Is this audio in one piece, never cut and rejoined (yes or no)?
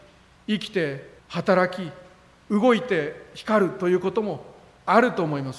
no